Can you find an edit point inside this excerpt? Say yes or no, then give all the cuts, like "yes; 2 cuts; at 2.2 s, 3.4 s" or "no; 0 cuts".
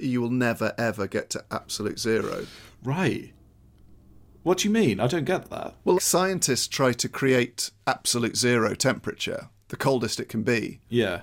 yes; 1 cut; at 6.0 s